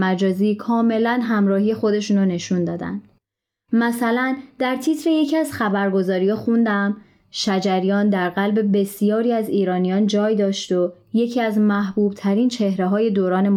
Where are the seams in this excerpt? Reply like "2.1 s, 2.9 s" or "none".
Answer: none